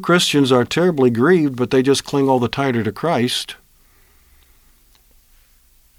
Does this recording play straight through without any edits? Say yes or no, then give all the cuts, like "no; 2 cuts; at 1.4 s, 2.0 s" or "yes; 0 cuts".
yes; 0 cuts